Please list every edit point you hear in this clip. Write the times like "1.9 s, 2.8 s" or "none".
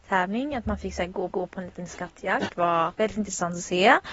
1.3 s, 2.5 s, 2.9 s

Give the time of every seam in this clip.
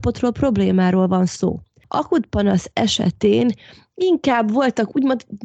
none

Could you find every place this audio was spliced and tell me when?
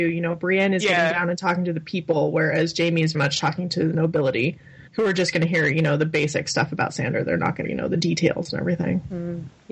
3.1 s, 4.9 s, 7.6 s

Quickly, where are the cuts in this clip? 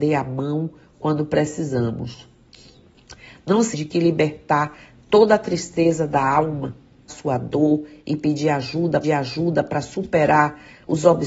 3.7 s, 7.1 s, 9.0 s

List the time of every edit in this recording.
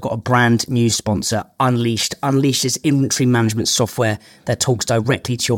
none

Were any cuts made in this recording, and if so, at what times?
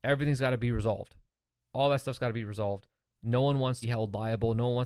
3.8 s

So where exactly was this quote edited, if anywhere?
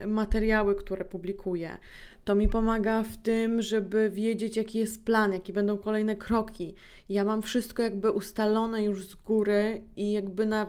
none

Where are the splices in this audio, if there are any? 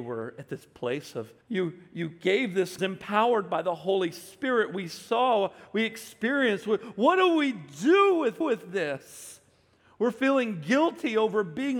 1.4 s, 2.8 s, 8.4 s

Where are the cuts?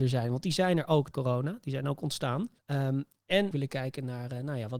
1.1 s, 2.6 s, 3.5 s

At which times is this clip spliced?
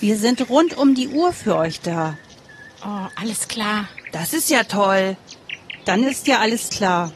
none

